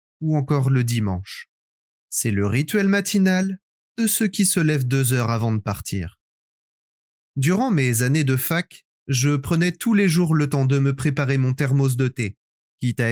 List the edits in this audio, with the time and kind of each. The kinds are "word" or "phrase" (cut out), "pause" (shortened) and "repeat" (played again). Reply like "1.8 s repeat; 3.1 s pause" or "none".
none